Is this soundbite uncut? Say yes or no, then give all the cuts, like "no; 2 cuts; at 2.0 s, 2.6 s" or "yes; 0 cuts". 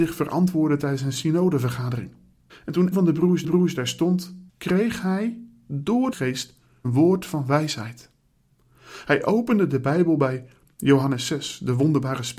no; 6 cuts; at 2.5 s, 2.9 s, 3.4 s, 4.5 s, 6.1 s, 6.8 s